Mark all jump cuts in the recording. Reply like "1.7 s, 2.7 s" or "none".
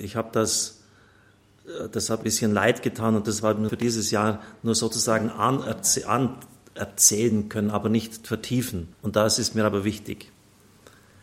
2.2 s, 3.7 s, 8.9 s